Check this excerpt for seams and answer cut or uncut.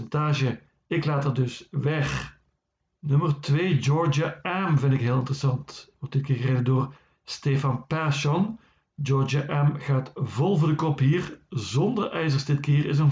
uncut